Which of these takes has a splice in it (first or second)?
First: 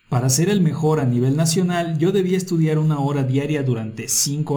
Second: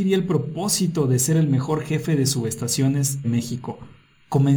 second